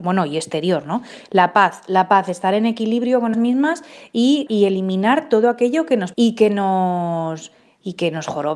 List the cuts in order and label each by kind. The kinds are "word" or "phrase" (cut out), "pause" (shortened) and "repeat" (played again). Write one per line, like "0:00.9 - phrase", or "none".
0:03.3 - word
0:04.5 - word
0:06.1 - word